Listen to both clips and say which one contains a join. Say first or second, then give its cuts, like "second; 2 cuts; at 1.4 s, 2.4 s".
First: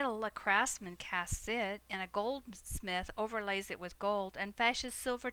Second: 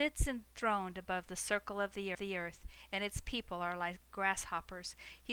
second; 1 cut; at 2.1 s